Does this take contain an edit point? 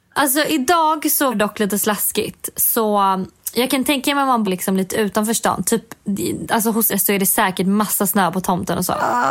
yes; 3 cuts; at 1.3 s, 4.4 s, 6.9 s

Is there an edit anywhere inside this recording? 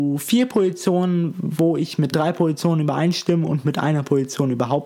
no; 0 cuts

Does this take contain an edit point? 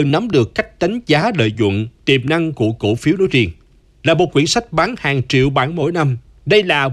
no; 0 cuts

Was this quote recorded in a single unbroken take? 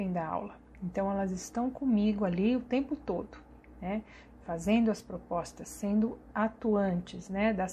yes; 0 cuts

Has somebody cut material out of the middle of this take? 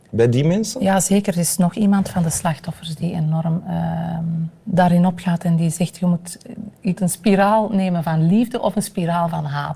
yes; 2 cuts; at 4.6 s, 7.0 s

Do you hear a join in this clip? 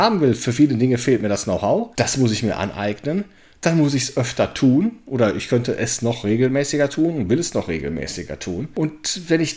no; 0 cuts

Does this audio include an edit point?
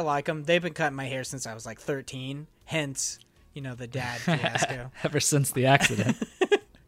no; 0 cuts

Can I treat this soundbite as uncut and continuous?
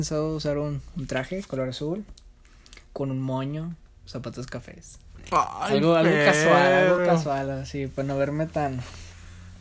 yes; 0 cuts

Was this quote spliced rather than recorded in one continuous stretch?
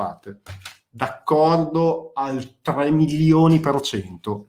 no; 0 cuts

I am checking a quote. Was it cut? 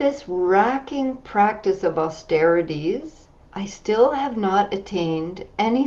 yes; 1 cut; at 3.4 s

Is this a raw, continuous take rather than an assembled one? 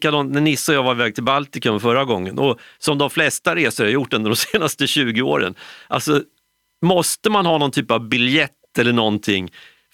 yes; 0 cuts

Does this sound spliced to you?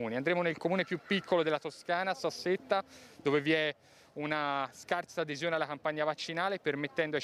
no; 0 cuts

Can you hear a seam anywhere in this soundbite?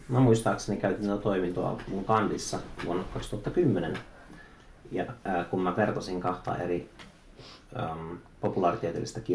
no; 0 cuts

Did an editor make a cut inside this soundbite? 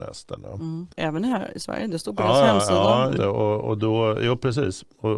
yes; 2 cuts; at 0.9 s, 3.2 s

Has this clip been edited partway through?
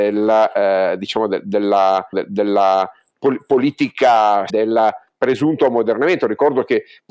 yes; 2 cuts; at 2.1 s, 4.5 s

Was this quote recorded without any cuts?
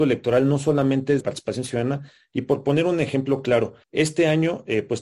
no; 2 cuts; at 1.2 s, 3.8 s

